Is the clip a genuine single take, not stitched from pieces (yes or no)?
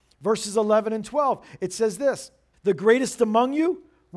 no